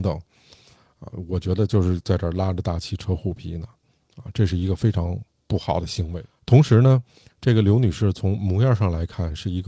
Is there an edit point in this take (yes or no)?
no